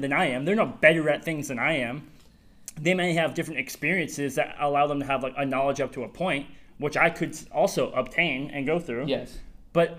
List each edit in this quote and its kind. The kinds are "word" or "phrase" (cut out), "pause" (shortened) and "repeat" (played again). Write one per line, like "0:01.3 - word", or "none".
none